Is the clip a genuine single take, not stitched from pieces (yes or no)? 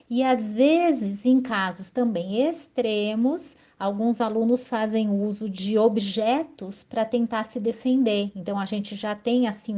yes